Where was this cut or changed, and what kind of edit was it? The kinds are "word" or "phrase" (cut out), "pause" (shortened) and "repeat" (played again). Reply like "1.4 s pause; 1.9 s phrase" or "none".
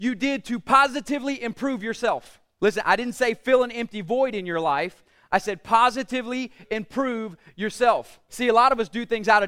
none